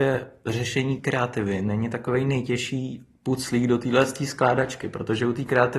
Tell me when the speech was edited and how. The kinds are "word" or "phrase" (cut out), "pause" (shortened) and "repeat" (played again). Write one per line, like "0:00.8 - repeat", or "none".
0:01.0 - word